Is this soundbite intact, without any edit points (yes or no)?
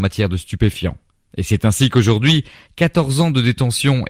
yes